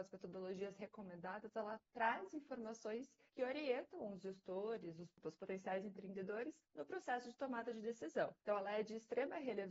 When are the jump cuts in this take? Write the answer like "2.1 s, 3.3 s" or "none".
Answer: 3.3 s, 6.6 s, 8.4 s